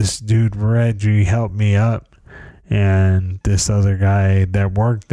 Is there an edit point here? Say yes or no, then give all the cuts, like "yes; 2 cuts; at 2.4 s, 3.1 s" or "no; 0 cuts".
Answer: no; 0 cuts